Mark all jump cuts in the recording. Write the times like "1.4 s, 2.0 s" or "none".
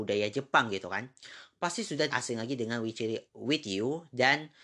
2.1 s, 3.3 s